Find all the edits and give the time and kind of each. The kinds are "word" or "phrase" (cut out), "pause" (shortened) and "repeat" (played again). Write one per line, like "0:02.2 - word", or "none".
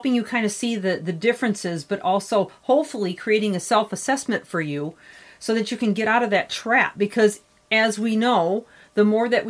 none